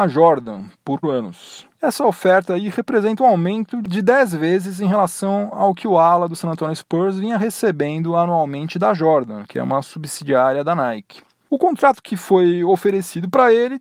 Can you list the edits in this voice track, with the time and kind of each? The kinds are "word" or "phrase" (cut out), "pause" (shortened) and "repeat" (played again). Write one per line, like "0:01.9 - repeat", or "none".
0:01.0 - word